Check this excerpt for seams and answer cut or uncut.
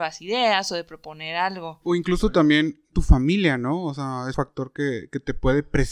cut